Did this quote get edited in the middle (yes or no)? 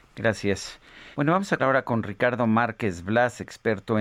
yes